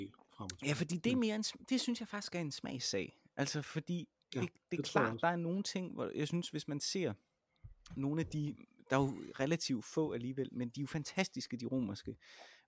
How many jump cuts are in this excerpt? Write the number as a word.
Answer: zero